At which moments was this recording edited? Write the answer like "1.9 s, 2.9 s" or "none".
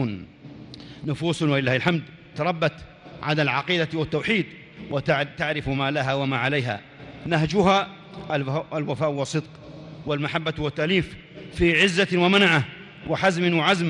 none